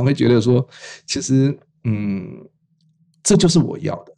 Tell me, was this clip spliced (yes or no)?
no